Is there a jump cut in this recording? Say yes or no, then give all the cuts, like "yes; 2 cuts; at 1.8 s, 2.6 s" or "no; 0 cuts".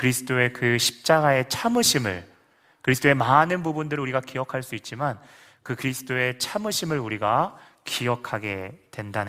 no; 0 cuts